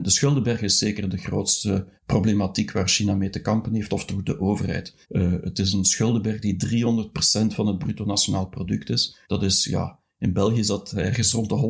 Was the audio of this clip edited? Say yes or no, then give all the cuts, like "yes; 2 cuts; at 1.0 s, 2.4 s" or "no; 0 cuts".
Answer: yes; 3 cuts; at 2.0 s, 5.0 s, 9.2 s